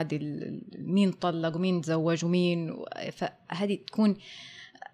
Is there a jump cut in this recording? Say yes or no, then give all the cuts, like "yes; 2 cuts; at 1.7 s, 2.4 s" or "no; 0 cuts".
no; 0 cuts